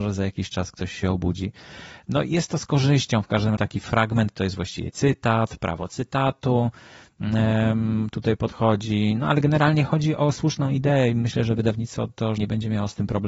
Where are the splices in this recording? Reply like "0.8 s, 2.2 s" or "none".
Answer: 3.6 s, 12.4 s